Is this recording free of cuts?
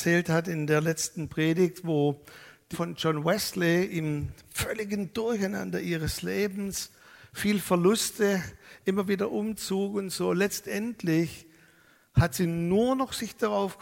no; 1 cut; at 2.7 s

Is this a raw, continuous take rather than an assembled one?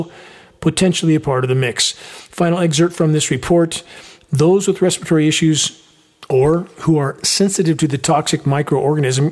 yes; 0 cuts

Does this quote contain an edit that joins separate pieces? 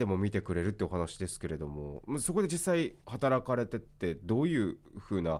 yes; 1 cut; at 3.0 s

